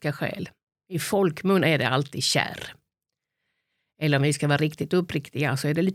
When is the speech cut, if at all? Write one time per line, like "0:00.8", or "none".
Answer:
none